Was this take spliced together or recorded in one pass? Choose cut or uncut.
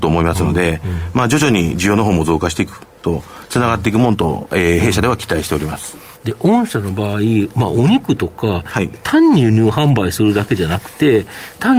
uncut